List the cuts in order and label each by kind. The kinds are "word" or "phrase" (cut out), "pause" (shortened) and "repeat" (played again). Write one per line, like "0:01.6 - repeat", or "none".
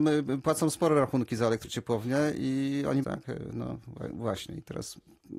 0:03.0 - phrase